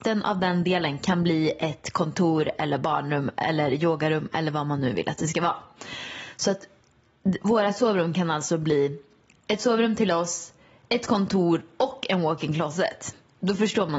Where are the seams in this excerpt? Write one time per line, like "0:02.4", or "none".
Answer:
none